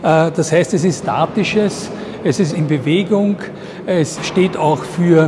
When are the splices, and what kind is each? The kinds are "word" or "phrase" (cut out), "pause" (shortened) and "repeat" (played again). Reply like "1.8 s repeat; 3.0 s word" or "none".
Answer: 1.0 s word; 2.5 s phrase; 4.2 s word